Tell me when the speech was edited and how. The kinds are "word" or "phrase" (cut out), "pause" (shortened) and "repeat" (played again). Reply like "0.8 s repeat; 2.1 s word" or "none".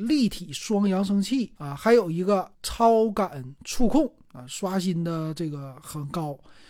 1.6 s pause; 2.5 s pause